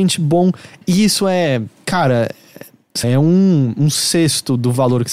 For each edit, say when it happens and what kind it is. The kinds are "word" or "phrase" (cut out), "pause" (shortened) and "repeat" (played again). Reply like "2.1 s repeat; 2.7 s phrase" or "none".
3.0 s word